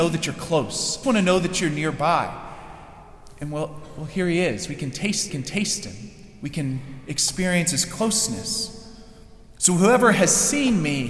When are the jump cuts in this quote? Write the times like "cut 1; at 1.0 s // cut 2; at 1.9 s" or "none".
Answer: cut 1; at 1.0 s // cut 2; at 5.3 s

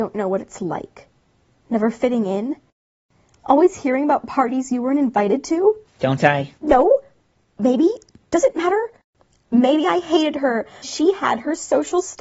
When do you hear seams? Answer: cut 1; at 6.6 s // cut 2; at 10.8 s

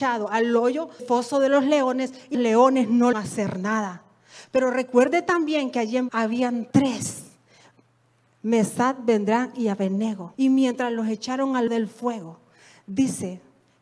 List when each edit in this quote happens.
cut 1; at 1.0 s // cut 2; at 2.3 s // cut 3; at 3.1 s // cut 4; at 6.1 s // cut 5; at 6.7 s // cut 6; at 10.3 s // cut 7; at 11.7 s

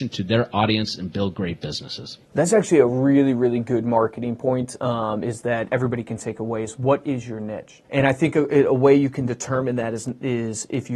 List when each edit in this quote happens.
cut 1; at 2.2 s // cut 2; at 7.8 s

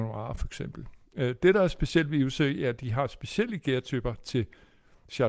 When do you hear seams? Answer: none

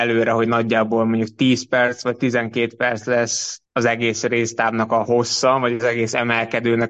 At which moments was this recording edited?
cut 1; at 3.7 s

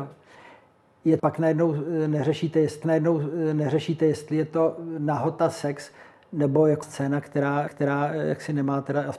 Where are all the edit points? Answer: cut 1; at 1.2 s // cut 2; at 2.8 s // cut 3; at 6.8 s // cut 4; at 7.7 s

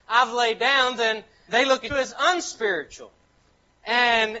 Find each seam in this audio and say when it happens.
cut 1; at 1.5 s // cut 2; at 1.9 s

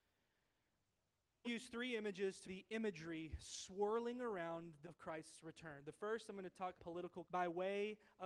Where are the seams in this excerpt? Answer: cut 1; at 1.4 s // cut 2; at 2.4 s // cut 3; at 4.8 s // cut 4; at 6.8 s // cut 5; at 7.2 s

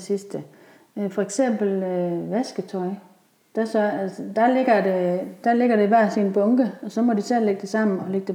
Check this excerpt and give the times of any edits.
none

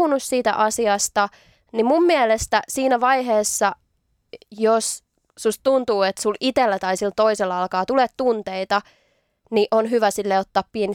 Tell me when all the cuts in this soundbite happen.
none

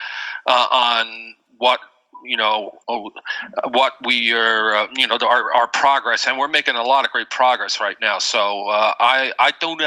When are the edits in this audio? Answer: cut 1; at 2.8 s

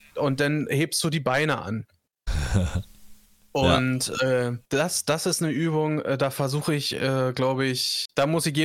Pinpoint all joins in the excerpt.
cut 1; at 4.6 s

